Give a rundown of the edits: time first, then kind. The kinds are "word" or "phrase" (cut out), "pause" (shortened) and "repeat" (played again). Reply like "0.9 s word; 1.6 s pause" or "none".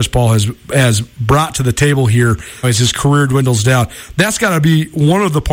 2.6 s word